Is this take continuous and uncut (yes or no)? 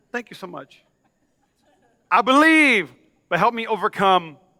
yes